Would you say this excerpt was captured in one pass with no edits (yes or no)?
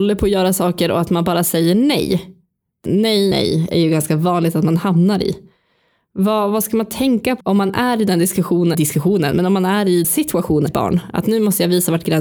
no